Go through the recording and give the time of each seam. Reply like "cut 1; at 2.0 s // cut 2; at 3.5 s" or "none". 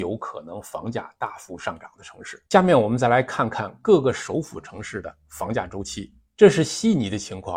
cut 1; at 2.5 s